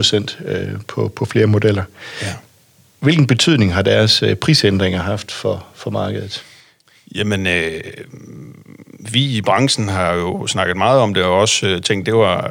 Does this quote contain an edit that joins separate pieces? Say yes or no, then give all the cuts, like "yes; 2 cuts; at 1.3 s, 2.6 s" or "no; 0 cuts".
no; 0 cuts